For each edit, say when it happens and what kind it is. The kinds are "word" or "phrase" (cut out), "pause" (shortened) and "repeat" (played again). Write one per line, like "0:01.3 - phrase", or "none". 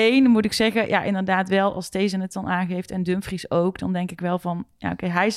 none